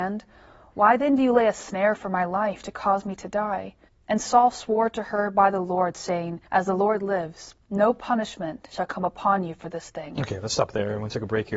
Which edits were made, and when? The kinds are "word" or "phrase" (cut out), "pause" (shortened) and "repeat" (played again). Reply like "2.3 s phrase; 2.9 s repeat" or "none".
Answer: 3.9 s pause; 6.5 s pause